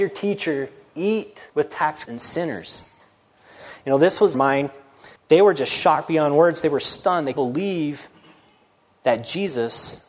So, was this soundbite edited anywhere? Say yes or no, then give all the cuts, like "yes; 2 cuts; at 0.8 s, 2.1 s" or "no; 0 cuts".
yes; 5 cuts; at 1.5 s, 2.1 s, 4.3 s, 5.2 s, 7.4 s